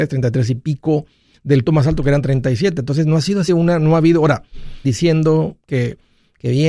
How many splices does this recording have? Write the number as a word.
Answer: three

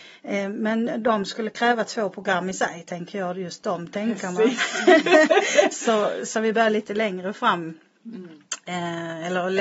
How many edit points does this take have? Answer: zero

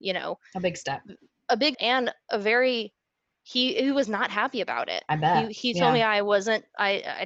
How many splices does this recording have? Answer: one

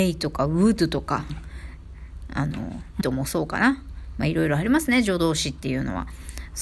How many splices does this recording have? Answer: one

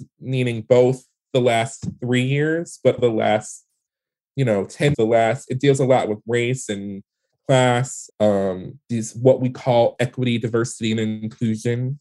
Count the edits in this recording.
four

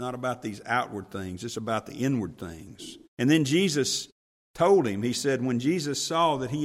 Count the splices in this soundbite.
one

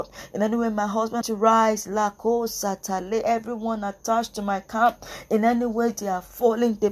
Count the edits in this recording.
one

